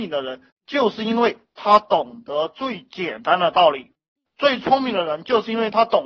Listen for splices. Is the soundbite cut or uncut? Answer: uncut